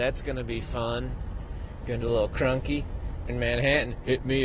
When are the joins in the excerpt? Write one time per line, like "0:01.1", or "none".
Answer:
0:02.0
0:03.3